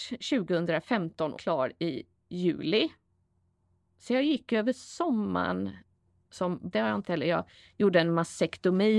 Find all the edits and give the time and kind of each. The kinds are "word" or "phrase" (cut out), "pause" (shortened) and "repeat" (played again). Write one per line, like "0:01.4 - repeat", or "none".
0:01.4 - word
0:06.7 - word
0:07.0 - word